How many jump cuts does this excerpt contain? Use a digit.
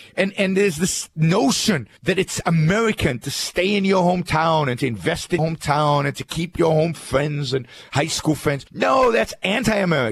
3